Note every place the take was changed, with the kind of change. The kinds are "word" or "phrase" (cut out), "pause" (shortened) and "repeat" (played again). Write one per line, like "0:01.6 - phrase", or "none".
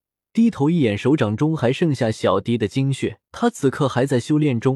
0:03.3 - pause